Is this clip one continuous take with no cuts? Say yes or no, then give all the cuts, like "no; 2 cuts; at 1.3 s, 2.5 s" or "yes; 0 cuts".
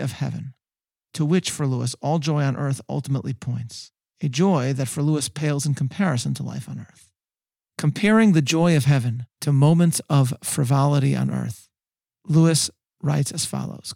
yes; 0 cuts